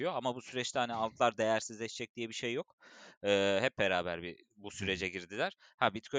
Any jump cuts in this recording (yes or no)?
no